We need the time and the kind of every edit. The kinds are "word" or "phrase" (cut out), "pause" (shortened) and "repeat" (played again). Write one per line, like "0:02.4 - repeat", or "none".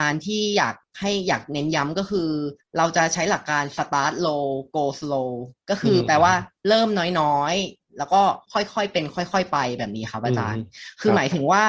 0:02.6 - pause
0:08.4 - pause